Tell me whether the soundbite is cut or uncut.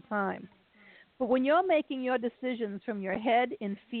uncut